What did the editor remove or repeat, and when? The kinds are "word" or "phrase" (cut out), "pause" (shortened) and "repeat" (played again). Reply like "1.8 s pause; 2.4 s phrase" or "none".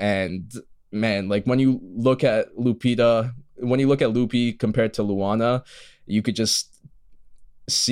none